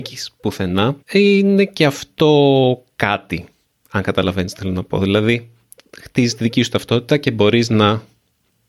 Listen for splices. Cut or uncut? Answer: cut